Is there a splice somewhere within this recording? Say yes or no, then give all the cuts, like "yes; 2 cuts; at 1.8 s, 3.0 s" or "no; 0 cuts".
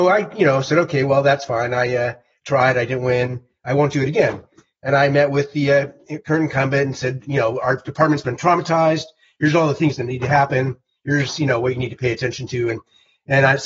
no; 0 cuts